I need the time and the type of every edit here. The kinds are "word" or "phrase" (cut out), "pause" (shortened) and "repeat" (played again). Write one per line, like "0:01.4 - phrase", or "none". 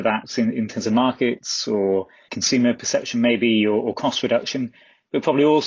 0:02.3 - word